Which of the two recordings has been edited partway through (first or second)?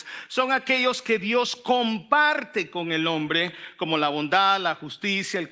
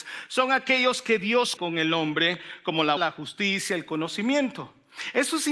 second